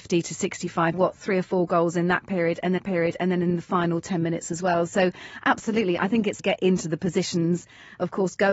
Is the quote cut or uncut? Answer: cut